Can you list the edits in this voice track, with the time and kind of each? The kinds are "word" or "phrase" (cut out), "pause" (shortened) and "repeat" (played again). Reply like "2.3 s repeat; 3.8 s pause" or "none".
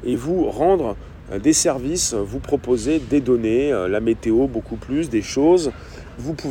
none